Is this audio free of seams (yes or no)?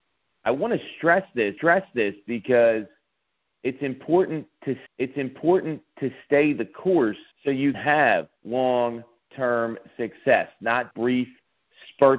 no